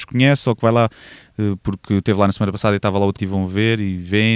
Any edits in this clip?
yes; 1 cut; at 3.2 s

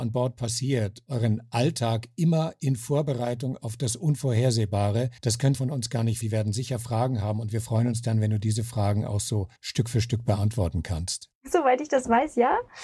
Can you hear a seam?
yes; 6 cuts; at 1.1 s, 5.2 s, 5.5 s, 6.2 s, 9.6 s, 11.4 s

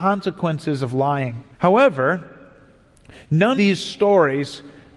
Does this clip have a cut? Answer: yes; 2 cuts; at 1.5 s, 3.6 s

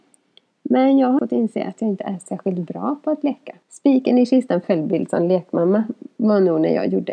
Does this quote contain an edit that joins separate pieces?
yes; 3 cuts; at 1.2 s, 3.6 s, 4.6 s

